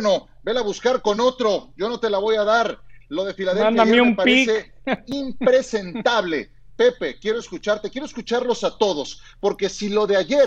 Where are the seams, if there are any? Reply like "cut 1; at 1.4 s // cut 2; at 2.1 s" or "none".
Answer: none